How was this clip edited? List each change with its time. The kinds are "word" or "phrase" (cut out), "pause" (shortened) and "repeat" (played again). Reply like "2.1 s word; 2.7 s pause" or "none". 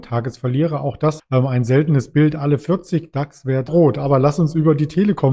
1.2 s word; 3.7 s phrase